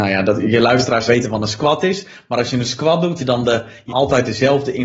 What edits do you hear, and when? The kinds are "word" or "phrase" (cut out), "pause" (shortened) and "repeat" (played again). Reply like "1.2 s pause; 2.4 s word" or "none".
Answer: 1.1 s word; 3.2 s word; 3.9 s word